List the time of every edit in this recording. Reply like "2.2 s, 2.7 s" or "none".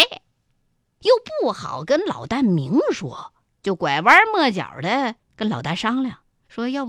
3.5 s, 5.2 s